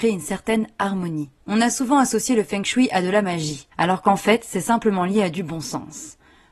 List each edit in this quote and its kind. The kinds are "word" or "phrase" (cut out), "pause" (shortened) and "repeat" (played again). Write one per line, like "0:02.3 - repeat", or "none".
0:01.4 - pause
0:03.7 - pause